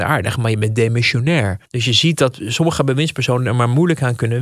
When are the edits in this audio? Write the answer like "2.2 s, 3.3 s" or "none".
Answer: 1.6 s